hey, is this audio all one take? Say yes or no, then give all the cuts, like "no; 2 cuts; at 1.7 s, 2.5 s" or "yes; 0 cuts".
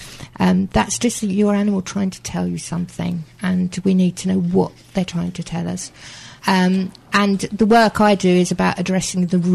no; 1 cut; at 6.4 s